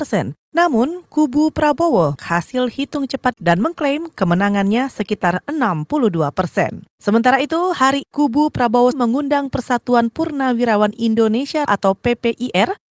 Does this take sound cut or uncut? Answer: cut